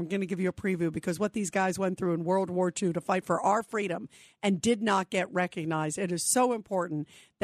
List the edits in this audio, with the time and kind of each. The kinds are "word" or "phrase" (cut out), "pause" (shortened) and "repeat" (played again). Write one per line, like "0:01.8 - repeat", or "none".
none